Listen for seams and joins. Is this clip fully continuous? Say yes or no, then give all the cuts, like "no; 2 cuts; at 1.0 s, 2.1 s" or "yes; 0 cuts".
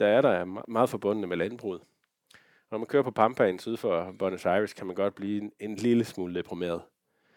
yes; 0 cuts